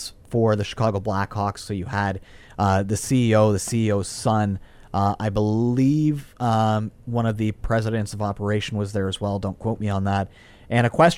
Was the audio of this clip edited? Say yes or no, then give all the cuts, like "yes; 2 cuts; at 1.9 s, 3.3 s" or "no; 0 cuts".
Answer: no; 0 cuts